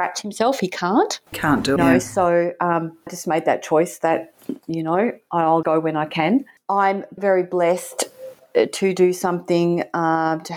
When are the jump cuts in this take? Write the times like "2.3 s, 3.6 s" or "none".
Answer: 1.3 s, 1.8 s, 3.1 s, 5.6 s, 7.2 s